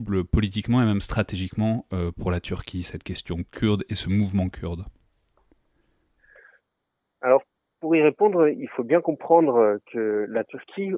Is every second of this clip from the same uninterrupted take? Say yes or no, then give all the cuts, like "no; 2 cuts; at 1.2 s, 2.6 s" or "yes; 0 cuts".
yes; 0 cuts